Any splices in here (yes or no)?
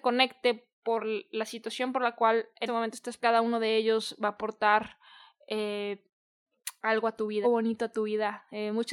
yes